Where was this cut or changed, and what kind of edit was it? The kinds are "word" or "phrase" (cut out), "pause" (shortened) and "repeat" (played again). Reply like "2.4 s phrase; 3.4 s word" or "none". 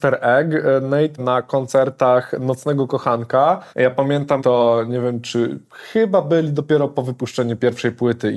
1.2 s phrase; 3.7 s pause; 4.4 s phrase